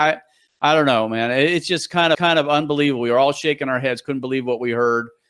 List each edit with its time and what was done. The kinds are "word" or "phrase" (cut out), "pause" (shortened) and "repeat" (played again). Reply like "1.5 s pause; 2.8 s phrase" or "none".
2.1 s repeat